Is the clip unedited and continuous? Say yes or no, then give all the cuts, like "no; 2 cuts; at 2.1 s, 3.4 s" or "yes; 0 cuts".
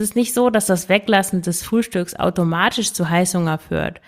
yes; 0 cuts